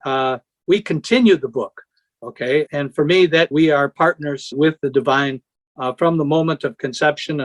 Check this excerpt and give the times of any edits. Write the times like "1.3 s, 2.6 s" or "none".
2.7 s, 3.5 s, 4.5 s